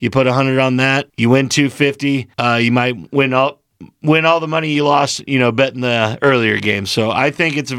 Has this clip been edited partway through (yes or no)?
yes